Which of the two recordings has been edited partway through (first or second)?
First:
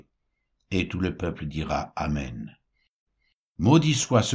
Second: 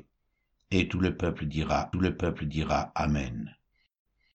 second